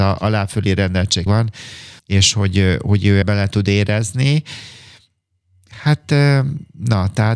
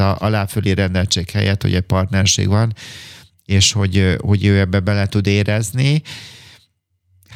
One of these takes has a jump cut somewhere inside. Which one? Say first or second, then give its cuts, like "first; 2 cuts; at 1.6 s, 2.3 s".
first; 3 cuts; at 1.3 s, 2.0 s, 3.2 s